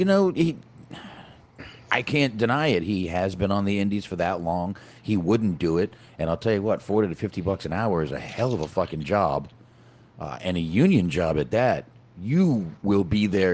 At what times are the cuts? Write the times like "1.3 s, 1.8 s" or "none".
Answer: none